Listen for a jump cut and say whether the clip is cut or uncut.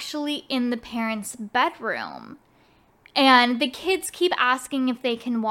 uncut